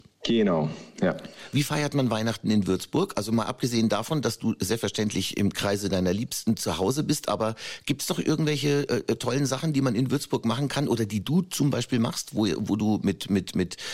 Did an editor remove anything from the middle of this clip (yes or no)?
no